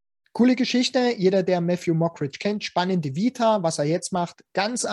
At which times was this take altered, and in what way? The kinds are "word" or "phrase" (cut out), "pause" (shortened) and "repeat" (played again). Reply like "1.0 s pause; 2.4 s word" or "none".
none